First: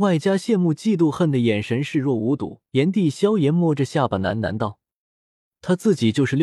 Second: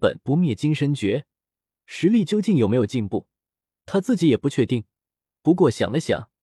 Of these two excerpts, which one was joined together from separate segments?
first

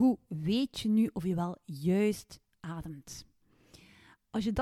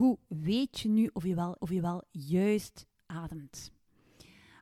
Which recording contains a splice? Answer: second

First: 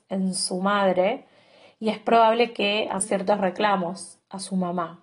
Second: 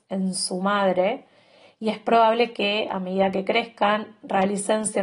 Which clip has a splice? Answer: first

